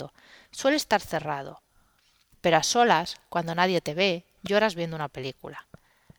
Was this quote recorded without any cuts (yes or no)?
yes